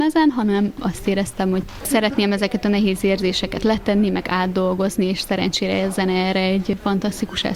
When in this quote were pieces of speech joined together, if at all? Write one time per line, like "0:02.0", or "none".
none